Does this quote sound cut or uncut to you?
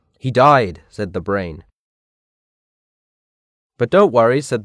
uncut